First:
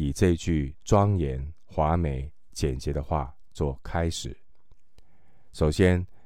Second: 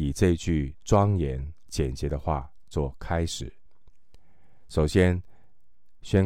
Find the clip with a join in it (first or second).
second